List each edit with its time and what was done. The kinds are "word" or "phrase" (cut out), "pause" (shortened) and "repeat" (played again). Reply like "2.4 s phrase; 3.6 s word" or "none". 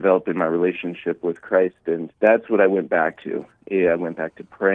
2.2 s pause